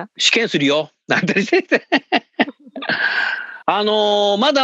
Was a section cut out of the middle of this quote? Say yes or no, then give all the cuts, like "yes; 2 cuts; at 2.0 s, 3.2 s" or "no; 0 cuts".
yes; 1 cut; at 3.6 s